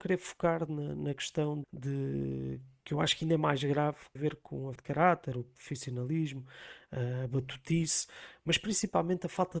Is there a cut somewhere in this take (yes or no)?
yes